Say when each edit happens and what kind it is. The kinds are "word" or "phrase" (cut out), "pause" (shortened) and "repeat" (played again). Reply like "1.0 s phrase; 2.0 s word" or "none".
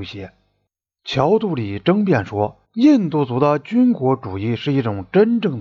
2.6 s pause